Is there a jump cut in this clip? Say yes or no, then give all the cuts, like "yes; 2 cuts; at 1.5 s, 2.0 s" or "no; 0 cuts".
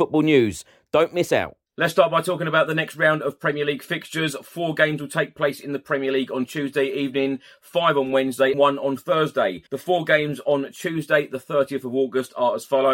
yes; 3 cuts; at 1.7 s, 8.5 s, 9.7 s